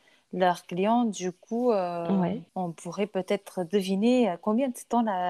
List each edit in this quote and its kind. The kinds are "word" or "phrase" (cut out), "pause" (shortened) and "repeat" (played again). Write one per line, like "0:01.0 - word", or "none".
0:02.5 - pause